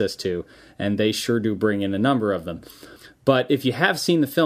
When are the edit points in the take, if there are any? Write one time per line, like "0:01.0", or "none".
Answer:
none